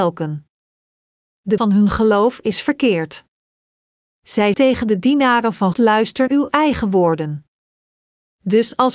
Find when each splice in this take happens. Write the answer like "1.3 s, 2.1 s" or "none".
1.6 s, 4.5 s, 5.7 s, 6.3 s